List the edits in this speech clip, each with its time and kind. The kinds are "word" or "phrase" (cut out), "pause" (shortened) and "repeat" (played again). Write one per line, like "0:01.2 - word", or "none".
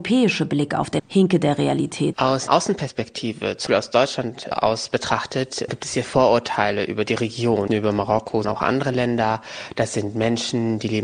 0:01.0 - word
0:02.1 - word
0:02.5 - word
0:03.7 - word
0:04.5 - word
0:05.7 - word
0:06.0 - word
0:07.7 - word
0:08.4 - word